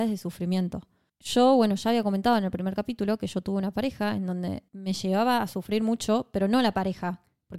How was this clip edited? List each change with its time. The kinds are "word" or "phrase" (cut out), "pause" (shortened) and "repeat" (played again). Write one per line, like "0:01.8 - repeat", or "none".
0:01.1 - pause
0:04.7 - pause